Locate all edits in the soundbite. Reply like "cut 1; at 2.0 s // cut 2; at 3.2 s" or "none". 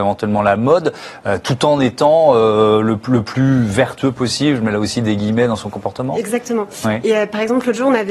none